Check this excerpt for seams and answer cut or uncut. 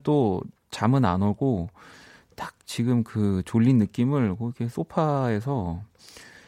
uncut